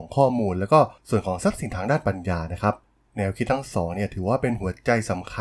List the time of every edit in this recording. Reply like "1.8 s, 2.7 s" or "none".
1.0 s